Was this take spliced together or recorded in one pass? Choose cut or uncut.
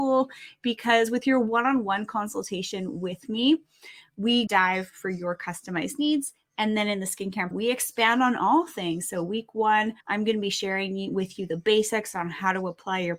cut